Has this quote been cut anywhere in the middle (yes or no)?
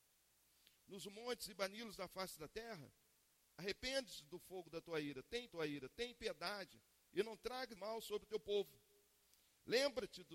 yes